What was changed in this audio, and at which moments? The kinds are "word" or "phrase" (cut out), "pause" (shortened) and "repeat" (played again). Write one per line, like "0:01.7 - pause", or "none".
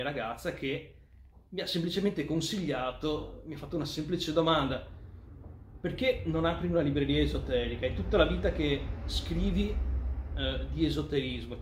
none

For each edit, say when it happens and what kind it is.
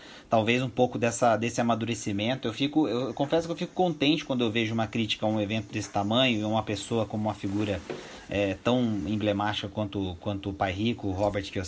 none

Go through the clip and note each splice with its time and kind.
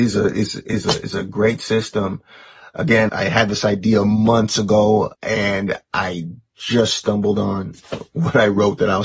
0:03.1 - word
0:05.1 - pause

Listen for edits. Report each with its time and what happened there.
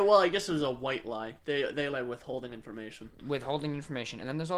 0:01.9 - word

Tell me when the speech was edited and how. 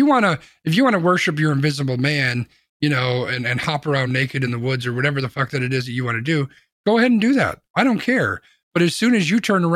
none

